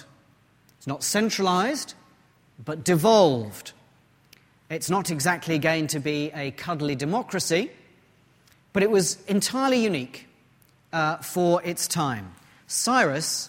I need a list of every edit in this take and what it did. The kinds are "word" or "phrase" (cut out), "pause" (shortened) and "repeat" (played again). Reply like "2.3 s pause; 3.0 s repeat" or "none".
none